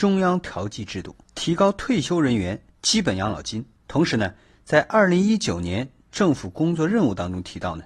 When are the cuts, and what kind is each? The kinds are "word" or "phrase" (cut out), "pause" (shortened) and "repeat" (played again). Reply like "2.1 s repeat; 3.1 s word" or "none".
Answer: none

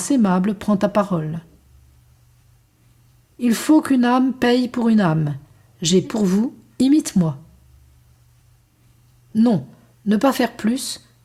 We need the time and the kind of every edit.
6.0 s word

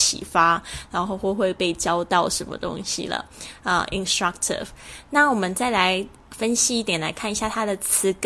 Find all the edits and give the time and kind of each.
none

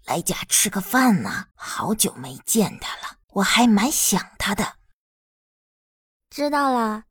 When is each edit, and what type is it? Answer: 1.5 s pause; 3.2 s pause

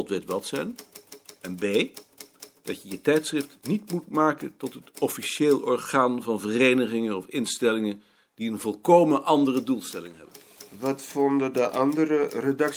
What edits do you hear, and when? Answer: none

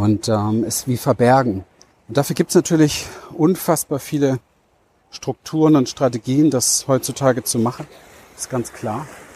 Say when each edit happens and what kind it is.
1.9 s pause

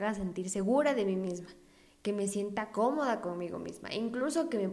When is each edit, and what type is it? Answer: none

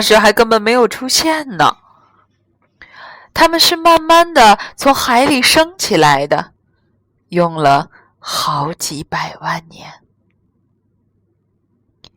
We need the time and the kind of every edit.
none

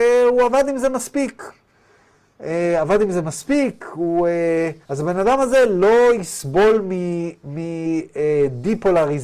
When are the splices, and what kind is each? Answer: 4.8 s pause

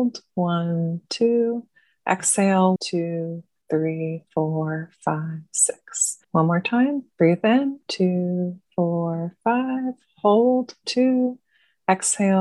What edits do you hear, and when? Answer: 2.8 s word; 4.3 s pause; 6.2 s pause; 7.1 s pause; 7.9 s word; 8.7 s word; 10.8 s word

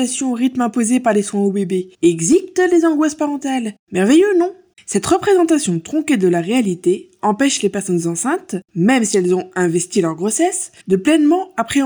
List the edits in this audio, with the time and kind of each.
1.9 s pause; 3.8 s pause; 4.7 s pause; 8.6 s pause; 10.8 s pause

